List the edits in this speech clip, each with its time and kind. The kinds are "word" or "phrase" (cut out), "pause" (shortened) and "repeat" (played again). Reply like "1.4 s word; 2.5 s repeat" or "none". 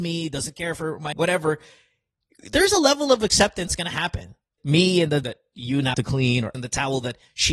1.1 s word; 3.7 s word; 4.6 s word; 5.2 s word; 5.9 s word; 6.5 s word